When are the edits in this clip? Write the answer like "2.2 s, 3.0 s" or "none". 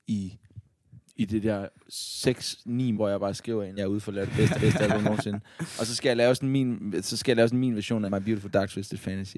2.9 s, 3.8 s, 4.5 s, 8.1 s